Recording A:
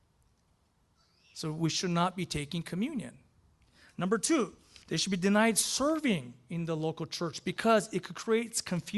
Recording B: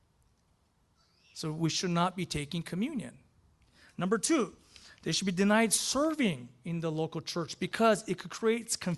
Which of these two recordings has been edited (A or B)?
A